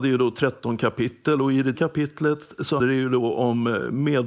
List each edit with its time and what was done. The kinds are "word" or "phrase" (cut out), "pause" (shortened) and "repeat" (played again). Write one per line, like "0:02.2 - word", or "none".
0:01.7 - word
0:02.8 - word